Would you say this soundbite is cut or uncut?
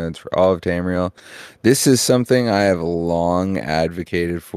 uncut